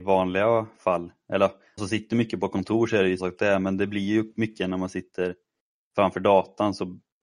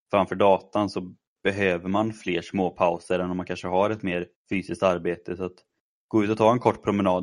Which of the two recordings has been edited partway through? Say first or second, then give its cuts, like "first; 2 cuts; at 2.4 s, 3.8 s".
first; 2 cuts; at 1.8 s, 3.2 s